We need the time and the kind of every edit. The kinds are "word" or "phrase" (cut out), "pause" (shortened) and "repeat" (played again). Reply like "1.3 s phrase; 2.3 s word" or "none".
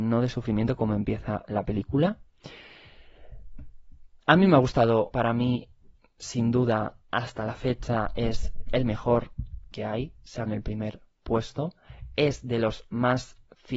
4.2 s pause; 5.1 s word; 9.7 s word; 10.5 s word

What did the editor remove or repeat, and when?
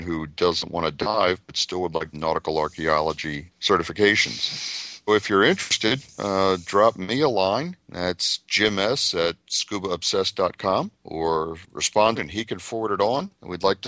2.1 s phrase; 5.1 s word; 12.2 s phrase

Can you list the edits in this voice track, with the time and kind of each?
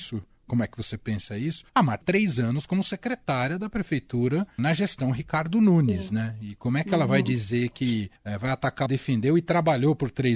1.7 s pause; 2.0 s word; 4.6 s word; 8.2 s pause; 8.9 s phrase

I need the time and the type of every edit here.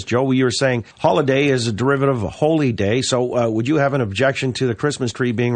0.9 s pause

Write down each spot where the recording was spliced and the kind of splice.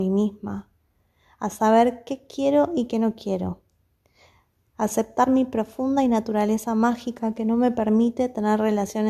none

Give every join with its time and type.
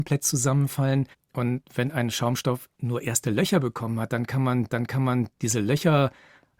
1.1 s pause; 2.7 s pause; 4.7 s repeat

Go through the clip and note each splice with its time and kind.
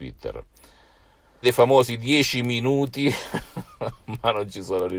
1.4 s phrase

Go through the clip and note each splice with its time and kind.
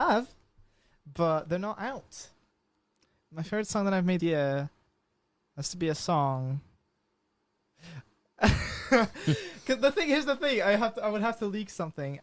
4.2 s word

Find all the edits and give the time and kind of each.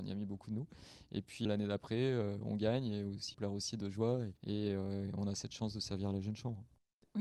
1.4 s word; 3.3 s word; 4.4 s pause

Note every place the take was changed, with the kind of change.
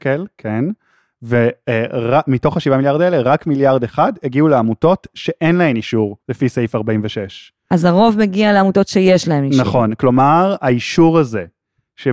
6.2 s pause

